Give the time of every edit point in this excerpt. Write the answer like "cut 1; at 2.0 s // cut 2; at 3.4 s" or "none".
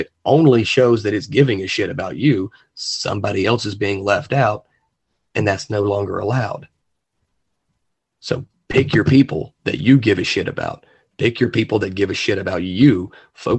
none